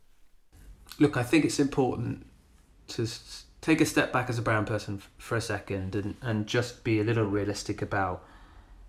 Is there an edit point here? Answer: no; 0 cuts

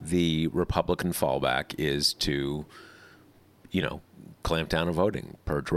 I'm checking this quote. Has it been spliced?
no; 0 cuts

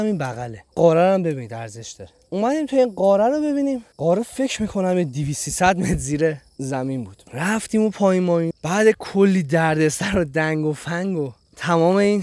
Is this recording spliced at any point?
yes; 2 cuts; at 7.3 s, 8.5 s

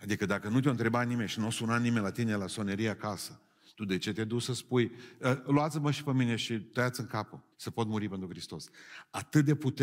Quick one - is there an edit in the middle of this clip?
yes; 1 cut; at 7.5 s

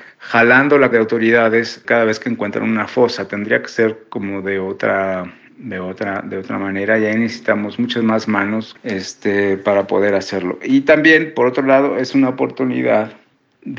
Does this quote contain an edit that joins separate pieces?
yes; 3 cuts; at 0.9 s, 1.8 s, 8.8 s

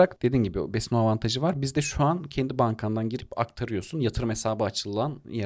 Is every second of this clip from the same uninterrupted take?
yes; 0 cuts

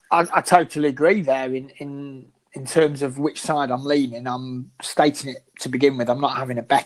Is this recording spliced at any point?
no; 0 cuts

